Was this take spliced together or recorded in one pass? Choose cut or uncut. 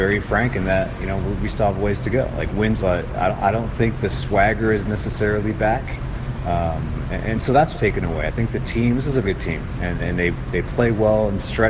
cut